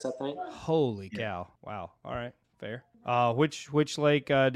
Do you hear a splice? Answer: yes; 2 cuts; at 1.6 s, 2.9 s

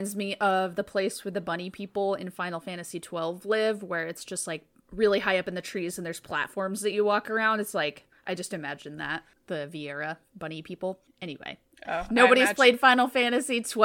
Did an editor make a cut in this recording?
no; 0 cuts

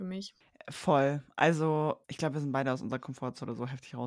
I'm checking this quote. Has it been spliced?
yes; 1 cut; at 2.0 s

